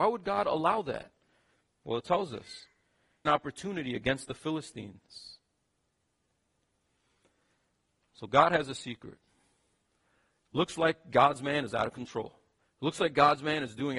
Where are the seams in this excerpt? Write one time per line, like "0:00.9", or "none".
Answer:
0:03.3